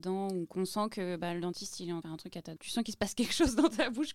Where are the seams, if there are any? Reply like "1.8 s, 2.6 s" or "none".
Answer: 2.0 s, 2.6 s